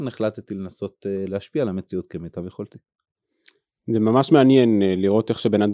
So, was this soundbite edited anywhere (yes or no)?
no